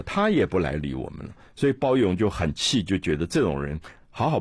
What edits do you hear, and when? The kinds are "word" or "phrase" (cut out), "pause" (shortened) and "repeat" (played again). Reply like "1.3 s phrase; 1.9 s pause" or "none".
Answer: none